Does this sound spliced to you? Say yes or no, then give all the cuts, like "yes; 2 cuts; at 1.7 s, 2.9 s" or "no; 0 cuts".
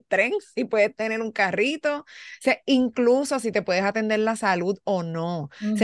no; 0 cuts